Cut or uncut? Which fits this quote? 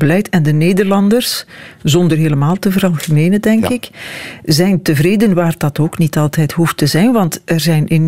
uncut